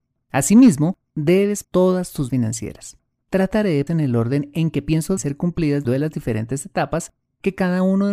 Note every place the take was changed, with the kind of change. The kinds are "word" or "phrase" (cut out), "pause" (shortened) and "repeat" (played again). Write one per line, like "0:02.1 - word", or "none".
0:01.6 - word
0:02.3 - word
0:03.9 - word
0:05.2 - word
0:05.8 - word